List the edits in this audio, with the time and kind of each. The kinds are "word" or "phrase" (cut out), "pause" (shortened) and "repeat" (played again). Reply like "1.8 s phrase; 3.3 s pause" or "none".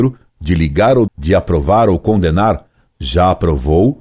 1.1 s word; 2.9 s word